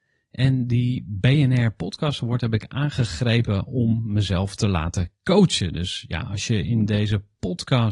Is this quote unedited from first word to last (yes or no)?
yes